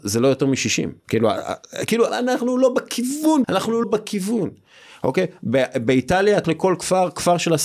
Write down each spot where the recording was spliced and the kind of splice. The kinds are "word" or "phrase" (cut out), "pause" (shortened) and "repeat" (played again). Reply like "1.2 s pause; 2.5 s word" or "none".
1.0 s pause; 2.1 s word; 3.4 s word; 3.8 s word; 6.4 s word